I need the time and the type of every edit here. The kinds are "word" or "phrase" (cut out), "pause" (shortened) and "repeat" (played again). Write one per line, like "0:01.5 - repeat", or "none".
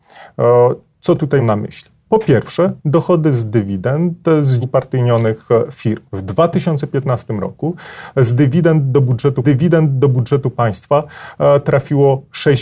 0:01.4 - word
0:02.8 - pause
0:04.6 - word
0:06.1 - pause
0:09.4 - repeat